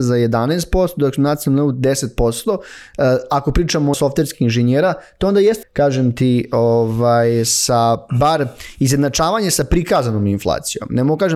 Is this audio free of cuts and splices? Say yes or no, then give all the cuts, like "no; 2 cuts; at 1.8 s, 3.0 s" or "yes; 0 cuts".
no; 2 cuts; at 3.9 s, 5.6 s